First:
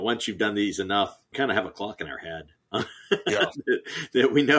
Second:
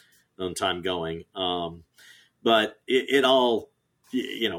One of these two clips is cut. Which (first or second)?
first